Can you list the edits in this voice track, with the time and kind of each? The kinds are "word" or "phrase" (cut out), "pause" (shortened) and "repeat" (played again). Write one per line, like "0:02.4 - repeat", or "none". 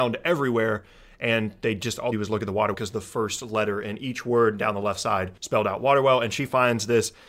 0:02.1 - phrase
0:02.7 - word
0:05.4 - pause